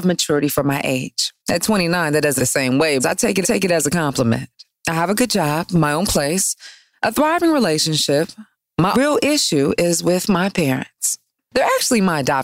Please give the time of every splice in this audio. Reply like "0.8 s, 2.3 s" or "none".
1.4 s, 2.4 s, 3.0 s, 3.4 s, 4.8 s, 8.9 s